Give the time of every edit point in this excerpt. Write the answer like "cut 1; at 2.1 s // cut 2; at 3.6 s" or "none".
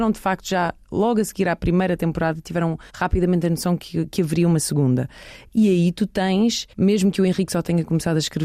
cut 1; at 2.9 s // cut 2; at 6.7 s